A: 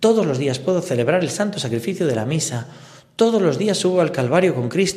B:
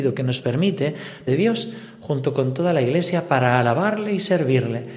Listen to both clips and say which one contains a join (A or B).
B